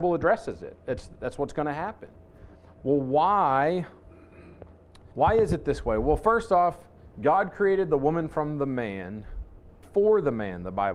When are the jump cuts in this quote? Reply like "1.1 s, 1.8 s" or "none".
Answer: 2.6 s, 5.1 s, 9.8 s